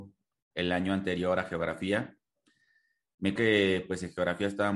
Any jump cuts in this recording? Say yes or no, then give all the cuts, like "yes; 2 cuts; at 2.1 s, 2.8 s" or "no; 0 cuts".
yes; 1 cut; at 3.4 s